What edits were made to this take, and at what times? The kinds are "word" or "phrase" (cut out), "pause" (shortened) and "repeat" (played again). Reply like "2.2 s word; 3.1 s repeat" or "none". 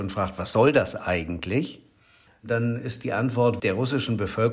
3.6 s word